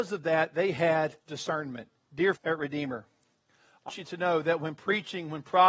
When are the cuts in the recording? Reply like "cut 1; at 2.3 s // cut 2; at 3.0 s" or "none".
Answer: cut 1; at 1.2 s // cut 2; at 2.4 s // cut 3; at 3.9 s